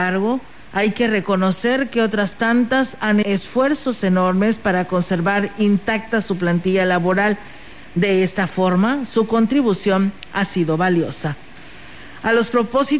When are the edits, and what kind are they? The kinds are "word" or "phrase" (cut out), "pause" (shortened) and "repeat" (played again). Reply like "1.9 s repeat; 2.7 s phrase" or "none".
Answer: 3.2 s word

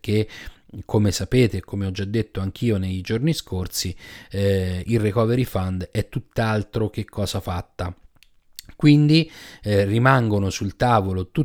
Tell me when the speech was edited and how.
none

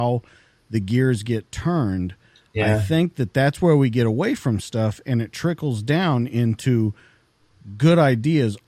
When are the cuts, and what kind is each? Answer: none

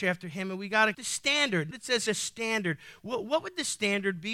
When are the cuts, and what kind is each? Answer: 0.9 s word; 1.7 s phrase; 2.1 s phrase

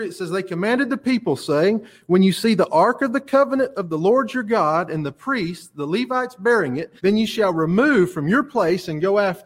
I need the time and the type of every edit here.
7.0 s pause

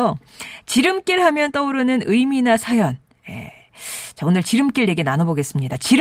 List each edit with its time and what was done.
none

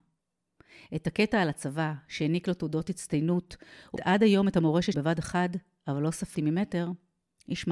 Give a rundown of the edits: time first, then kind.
4.0 s word; 4.9 s word; 6.3 s word

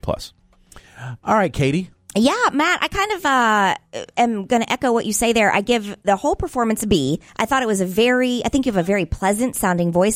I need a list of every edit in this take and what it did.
7.3 s pause

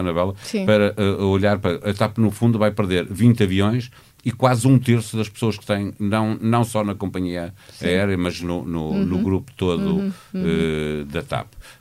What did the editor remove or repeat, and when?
none

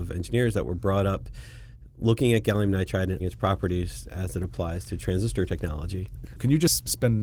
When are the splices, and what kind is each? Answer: 3.2 s word

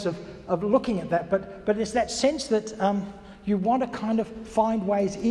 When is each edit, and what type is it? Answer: none

